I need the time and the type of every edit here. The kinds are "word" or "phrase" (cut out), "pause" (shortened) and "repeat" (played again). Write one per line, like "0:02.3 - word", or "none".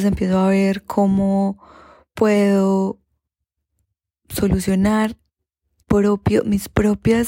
0:05.8 - word